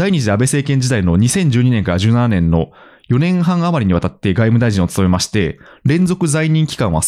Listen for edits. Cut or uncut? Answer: uncut